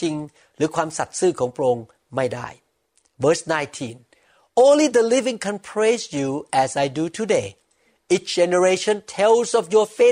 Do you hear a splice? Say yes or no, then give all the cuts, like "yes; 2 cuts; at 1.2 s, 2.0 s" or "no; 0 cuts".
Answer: no; 0 cuts